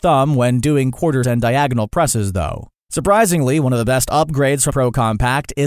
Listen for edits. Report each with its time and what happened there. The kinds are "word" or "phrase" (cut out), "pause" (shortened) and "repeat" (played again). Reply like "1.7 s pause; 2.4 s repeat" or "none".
1.2 s word; 4.7 s word